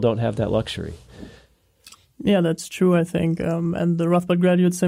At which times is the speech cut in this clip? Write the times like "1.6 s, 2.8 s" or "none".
none

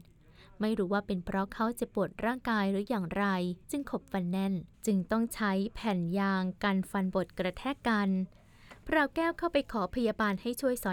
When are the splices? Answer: 3.6 s, 4.7 s

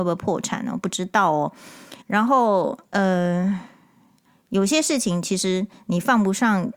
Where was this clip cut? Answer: 2.0 s, 2.8 s

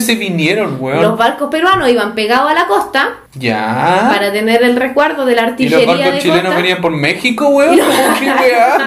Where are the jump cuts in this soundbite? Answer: 3.3 s

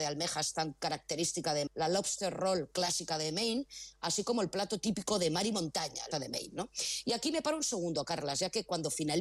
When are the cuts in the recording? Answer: 1.7 s, 6.1 s

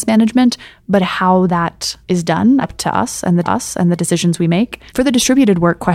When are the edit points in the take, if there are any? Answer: 2.0 s, 2.6 s, 3.4 s, 4.9 s

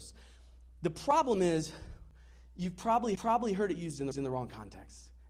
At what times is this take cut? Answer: 3.2 s, 4.1 s

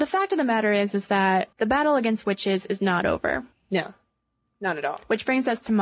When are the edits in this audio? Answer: 1.5 s, 3.5 s

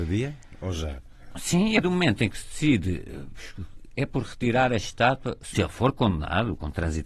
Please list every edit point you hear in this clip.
1.8 s, 5.5 s

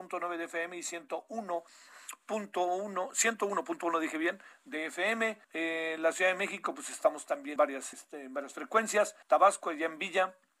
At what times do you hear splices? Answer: 5.4 s, 7.6 s, 7.9 s, 9.2 s

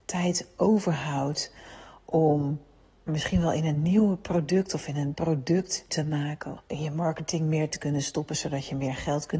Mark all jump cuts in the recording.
3.1 s, 5.1 s, 5.9 s, 6.6 s, 7.7 s

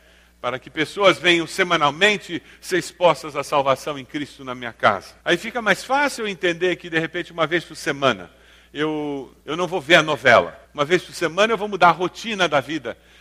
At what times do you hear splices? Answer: 5.2 s, 9.4 s, 10.6 s

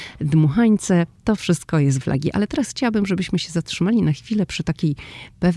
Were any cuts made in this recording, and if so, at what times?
2.0 s

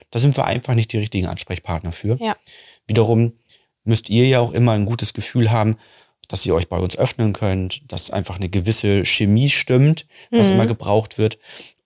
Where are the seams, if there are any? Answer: none

